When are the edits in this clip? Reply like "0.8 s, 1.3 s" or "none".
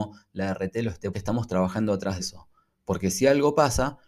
1.1 s, 2.2 s